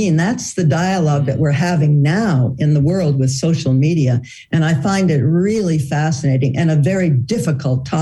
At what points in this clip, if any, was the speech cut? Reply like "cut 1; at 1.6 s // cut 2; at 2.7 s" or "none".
none